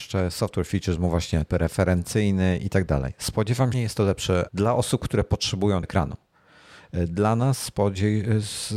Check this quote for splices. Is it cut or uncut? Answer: cut